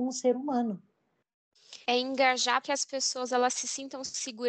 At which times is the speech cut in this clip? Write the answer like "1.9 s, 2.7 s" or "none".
1.8 s, 2.6 s